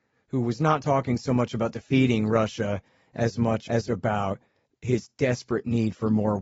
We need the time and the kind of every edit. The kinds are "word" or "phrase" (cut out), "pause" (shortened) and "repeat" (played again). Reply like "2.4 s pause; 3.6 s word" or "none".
none